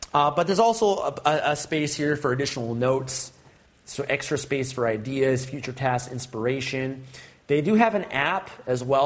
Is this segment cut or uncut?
uncut